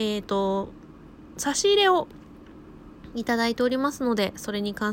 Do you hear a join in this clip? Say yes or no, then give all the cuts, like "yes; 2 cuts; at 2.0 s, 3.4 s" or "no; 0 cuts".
no; 0 cuts